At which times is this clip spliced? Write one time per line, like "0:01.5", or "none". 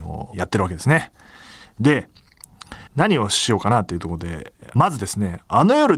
0:02.9